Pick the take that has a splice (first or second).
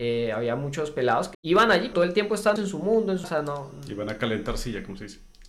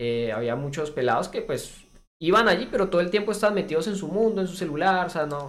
first